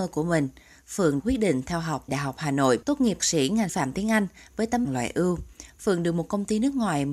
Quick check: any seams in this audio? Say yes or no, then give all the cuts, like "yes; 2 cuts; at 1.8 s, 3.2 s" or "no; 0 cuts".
yes; 6 cuts; at 1.2 s, 2.1 s, 2.8 s, 3.2 s, 3.7 s, 4.8 s